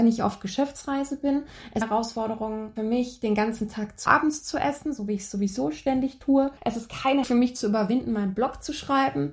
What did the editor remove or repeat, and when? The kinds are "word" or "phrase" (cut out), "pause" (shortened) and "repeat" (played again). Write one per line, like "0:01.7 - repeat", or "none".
0:01.8 - phrase
0:02.8 - word
0:04.1 - phrase
0:06.6 - pause
0:07.2 - word